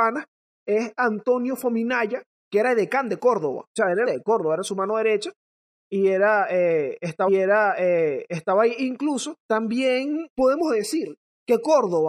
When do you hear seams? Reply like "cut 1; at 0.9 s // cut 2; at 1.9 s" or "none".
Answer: cut 1; at 4.1 s // cut 2; at 7.3 s // cut 3; at 9.4 s

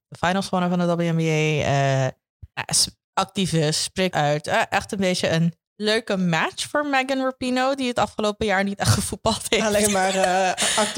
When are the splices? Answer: cut 1; at 2.5 s // cut 2; at 4.1 s

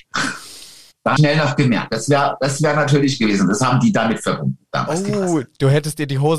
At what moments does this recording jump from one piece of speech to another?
cut 1; at 1.2 s

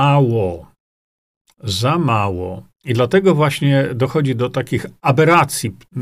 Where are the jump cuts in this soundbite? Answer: cut 1; at 2.7 s

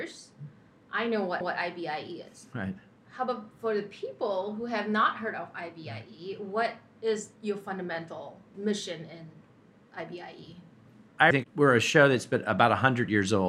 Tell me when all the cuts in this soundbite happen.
cut 1; at 1.4 s // cut 2; at 11.3 s

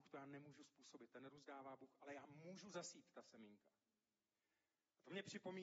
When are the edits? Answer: none

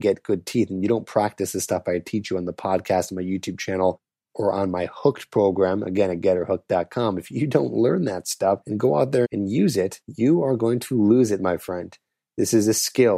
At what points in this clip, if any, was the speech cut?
cut 1; at 9.2 s

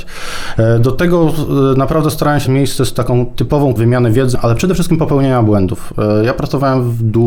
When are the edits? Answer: cut 1; at 2.4 s // cut 2; at 3.8 s // cut 3; at 4.3 s

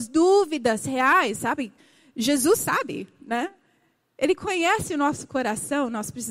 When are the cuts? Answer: none

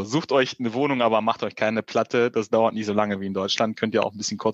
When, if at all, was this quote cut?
none

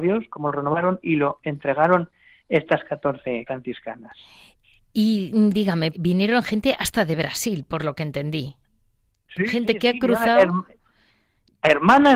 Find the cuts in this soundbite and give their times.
cut 1; at 3.5 s // cut 2; at 5.9 s

